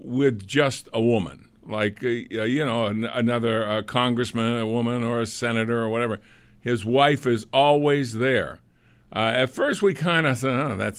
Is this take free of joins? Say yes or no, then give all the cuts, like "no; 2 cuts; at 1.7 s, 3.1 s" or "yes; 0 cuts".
yes; 0 cuts